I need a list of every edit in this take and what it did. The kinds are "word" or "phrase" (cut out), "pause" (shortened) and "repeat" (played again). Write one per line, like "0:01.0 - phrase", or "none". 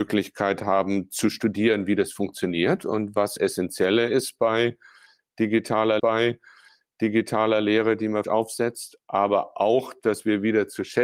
0:03.4 - phrase
0:06.0 - repeat
0:08.2 - word